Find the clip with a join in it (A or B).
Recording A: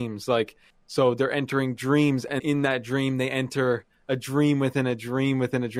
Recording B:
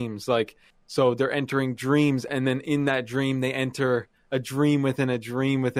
A